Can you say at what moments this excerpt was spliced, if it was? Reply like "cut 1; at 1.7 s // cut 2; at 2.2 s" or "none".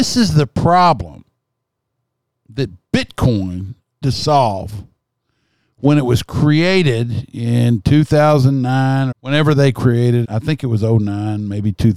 cut 1; at 4.0 s // cut 2; at 9.1 s // cut 3; at 10.2 s